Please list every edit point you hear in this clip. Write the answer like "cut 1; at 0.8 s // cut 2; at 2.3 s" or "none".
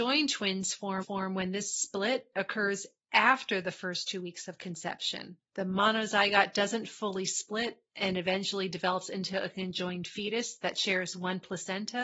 cut 1; at 1.0 s // cut 2; at 5.4 s